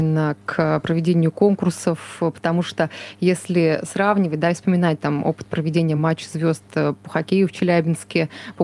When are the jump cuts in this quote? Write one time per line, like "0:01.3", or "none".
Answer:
none